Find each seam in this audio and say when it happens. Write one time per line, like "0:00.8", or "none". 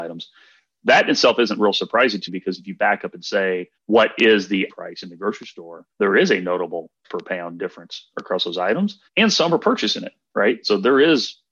0:02.3
0:03.8
0:04.7
0:05.9
0:07.0
0:09.1